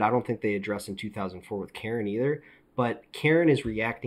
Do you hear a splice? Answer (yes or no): no